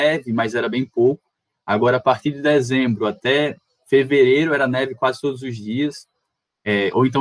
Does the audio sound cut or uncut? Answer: uncut